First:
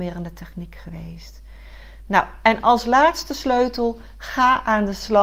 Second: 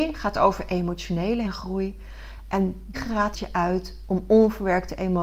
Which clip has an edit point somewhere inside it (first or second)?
second